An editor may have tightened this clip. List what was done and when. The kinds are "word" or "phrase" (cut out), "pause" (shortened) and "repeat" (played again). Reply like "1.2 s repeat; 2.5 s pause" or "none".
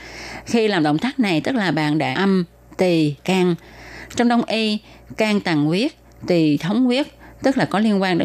2.1 s phrase; 3.2 s phrase